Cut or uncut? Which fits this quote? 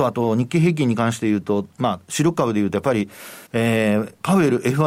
cut